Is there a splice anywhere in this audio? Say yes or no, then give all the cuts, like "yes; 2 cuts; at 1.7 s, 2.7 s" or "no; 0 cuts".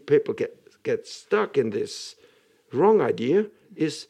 no; 0 cuts